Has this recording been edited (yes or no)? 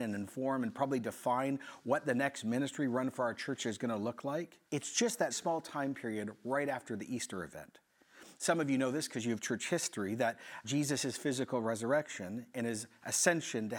yes